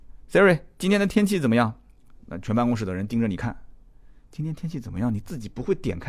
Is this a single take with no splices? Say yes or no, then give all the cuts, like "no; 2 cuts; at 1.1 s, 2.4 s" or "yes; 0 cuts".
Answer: yes; 0 cuts